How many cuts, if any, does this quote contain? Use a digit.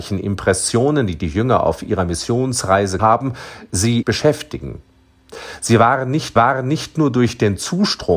3